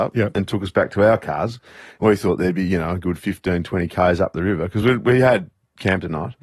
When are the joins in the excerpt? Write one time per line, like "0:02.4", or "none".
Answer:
none